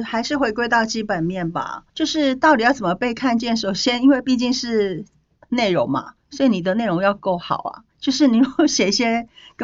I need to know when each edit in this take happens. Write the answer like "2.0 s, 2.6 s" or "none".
1.9 s, 6.2 s, 7.9 s